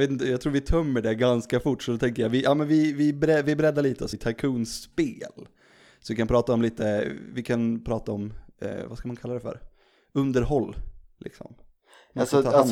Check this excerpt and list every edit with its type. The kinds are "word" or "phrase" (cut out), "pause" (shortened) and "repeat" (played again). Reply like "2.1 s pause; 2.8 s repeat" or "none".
4.1 s word